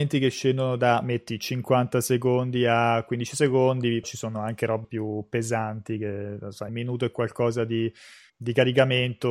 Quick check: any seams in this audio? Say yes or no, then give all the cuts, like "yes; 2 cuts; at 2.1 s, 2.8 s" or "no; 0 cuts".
yes; 4 cuts; at 4.0 s, 4.8 s, 6.7 s, 8.3 s